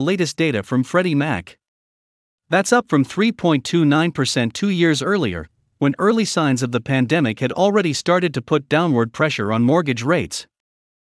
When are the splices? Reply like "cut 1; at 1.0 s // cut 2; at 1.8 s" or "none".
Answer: none